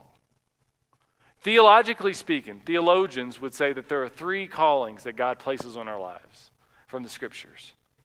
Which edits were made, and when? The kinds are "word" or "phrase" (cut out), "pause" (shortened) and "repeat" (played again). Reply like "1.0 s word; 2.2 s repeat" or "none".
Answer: none